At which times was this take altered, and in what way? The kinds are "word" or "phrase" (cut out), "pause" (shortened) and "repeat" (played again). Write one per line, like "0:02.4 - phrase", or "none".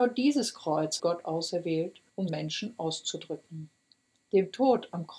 0:01.0 - word
0:02.3 - phrase